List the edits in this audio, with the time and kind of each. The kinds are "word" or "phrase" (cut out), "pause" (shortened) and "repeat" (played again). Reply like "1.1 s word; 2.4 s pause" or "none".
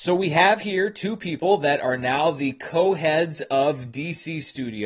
none